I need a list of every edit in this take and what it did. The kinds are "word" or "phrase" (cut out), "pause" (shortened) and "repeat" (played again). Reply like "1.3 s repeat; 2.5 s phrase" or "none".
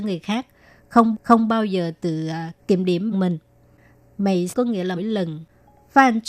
1.1 s repeat; 2.6 s pause; 3.1 s phrase; 4.5 s word; 5.0 s word